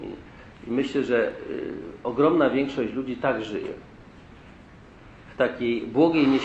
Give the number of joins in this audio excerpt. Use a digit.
0